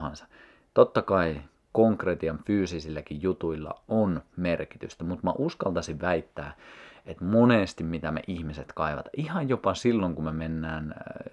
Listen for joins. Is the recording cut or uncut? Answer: uncut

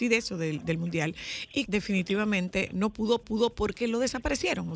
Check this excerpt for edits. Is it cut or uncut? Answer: cut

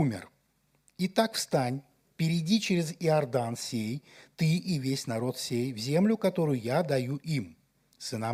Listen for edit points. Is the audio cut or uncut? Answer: uncut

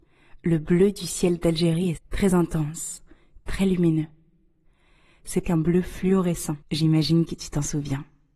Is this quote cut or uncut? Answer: cut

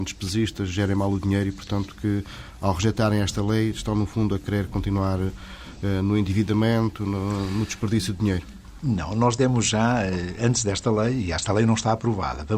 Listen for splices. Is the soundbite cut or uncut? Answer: uncut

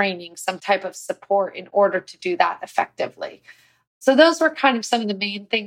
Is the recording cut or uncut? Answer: uncut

